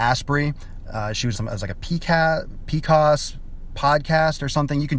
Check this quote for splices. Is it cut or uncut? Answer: cut